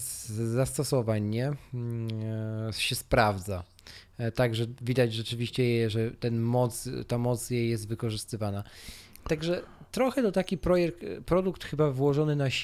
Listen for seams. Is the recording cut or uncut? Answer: uncut